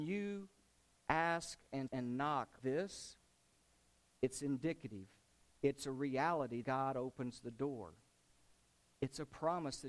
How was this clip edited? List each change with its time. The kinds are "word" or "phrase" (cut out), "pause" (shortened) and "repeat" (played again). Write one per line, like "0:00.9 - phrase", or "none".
0:01.9 - word
0:02.6 - word
0:06.6 - word

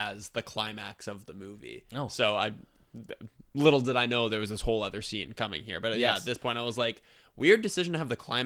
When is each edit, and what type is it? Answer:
none

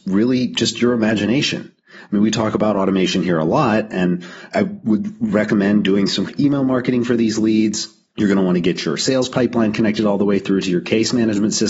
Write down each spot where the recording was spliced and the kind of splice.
0:04.5 - word
0:06.2 - word
0:08.1 - pause

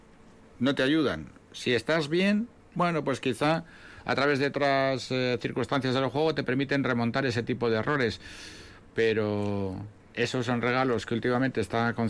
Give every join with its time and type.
none

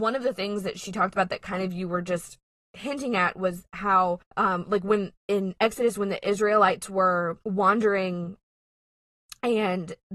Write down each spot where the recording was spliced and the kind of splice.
0:02.6 - pause
0:04.3 - pause
0:05.2 - pause
0:07.4 - pause

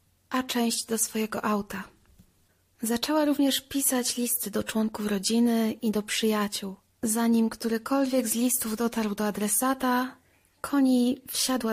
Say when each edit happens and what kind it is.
none

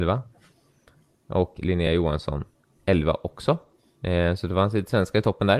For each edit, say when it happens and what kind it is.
none

